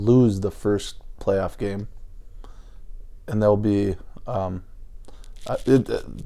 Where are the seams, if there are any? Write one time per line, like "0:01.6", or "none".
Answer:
none